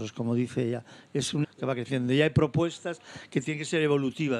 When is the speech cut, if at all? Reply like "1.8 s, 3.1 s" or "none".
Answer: 1.4 s